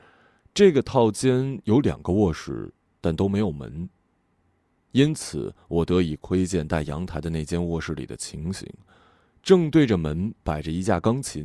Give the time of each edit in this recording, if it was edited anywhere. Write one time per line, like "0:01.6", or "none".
none